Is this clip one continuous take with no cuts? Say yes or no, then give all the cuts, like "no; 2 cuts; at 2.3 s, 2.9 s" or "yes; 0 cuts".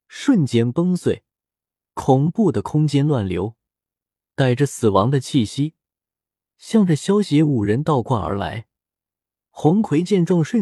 yes; 0 cuts